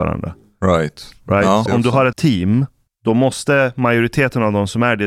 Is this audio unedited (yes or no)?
no